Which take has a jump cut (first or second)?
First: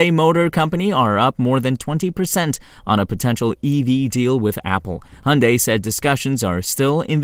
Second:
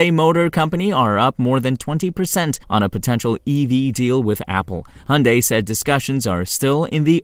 second